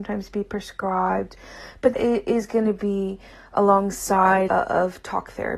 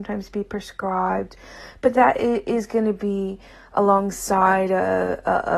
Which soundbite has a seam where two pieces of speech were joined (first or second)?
first